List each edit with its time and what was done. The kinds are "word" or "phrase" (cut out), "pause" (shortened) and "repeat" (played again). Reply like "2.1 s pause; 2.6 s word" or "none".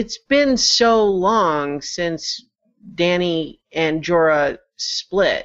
none